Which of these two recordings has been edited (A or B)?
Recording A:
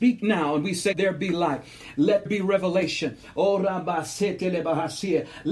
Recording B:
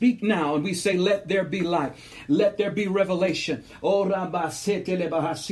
A